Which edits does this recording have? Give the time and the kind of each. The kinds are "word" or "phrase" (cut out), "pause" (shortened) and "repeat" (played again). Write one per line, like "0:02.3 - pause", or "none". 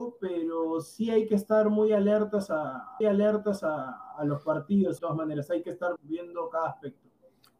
0:03.0 - repeat
0:05.0 - phrase
0:06.0 - word

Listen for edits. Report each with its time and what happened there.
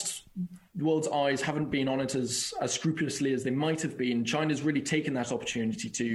none

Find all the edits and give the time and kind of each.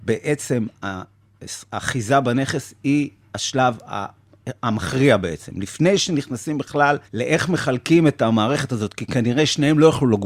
0:07.1 - pause

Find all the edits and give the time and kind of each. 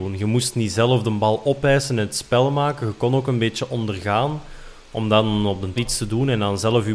0:05.8 - word

